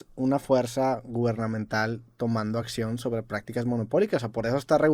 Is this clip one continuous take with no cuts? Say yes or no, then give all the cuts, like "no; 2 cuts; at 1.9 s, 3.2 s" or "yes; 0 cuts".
yes; 0 cuts